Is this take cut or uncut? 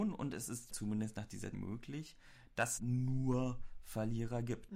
cut